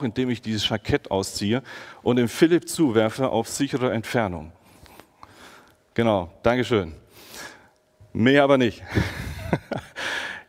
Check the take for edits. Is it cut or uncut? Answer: uncut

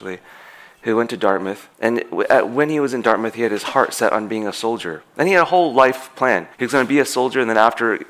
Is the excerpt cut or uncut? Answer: cut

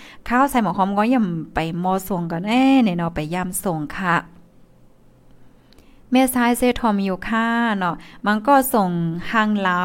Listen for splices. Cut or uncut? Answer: uncut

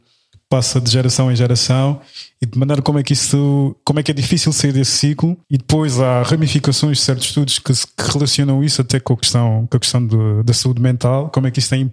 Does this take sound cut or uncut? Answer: cut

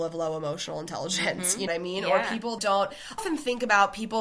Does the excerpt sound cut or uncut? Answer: cut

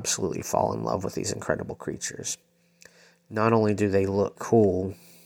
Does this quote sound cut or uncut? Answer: cut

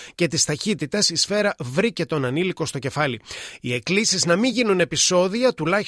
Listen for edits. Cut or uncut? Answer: uncut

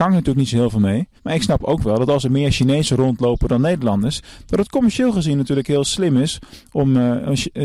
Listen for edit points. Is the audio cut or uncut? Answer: cut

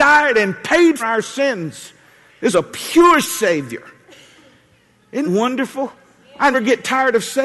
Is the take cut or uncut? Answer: cut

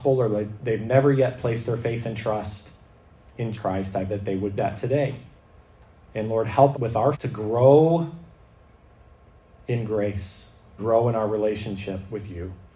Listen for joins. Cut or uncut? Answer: cut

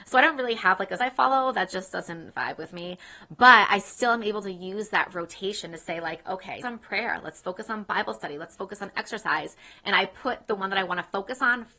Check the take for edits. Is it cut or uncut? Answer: cut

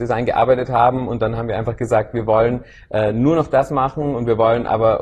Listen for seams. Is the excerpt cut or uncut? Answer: uncut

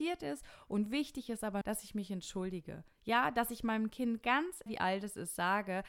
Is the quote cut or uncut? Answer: cut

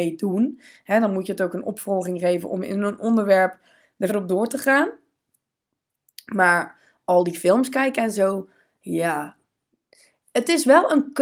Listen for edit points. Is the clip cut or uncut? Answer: cut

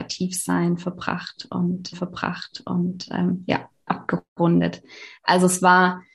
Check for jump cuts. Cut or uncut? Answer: cut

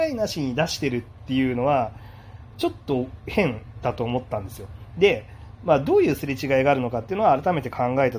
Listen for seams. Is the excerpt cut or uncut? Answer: uncut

